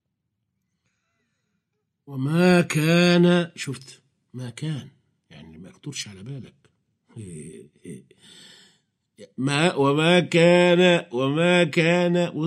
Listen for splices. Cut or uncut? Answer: uncut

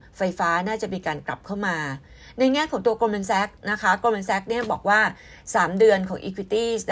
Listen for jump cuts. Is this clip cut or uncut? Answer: uncut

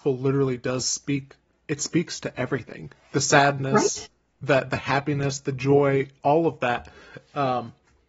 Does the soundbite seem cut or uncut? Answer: uncut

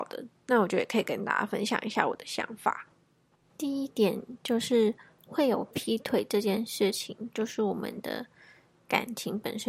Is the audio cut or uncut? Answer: uncut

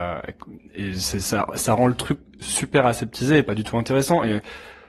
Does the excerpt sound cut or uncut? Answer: uncut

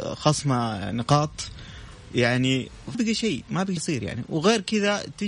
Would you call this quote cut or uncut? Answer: cut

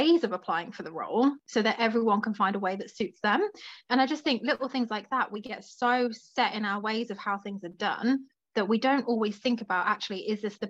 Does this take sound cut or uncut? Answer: uncut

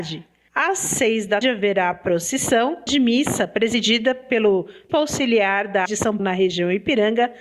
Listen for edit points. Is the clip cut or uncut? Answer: cut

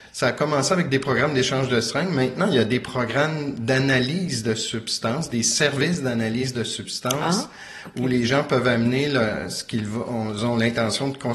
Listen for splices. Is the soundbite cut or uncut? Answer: uncut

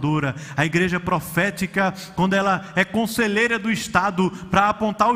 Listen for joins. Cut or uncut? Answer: uncut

